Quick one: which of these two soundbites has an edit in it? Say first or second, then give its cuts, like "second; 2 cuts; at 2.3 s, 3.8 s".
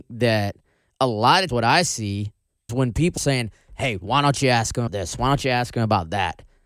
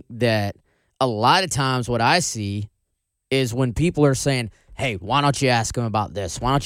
first; 4 cuts; at 1.5 s, 2.7 s, 3.2 s, 4.9 s